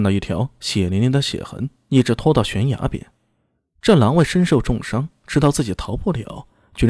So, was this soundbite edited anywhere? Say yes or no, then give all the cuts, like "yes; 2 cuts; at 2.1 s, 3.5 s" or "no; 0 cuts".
no; 0 cuts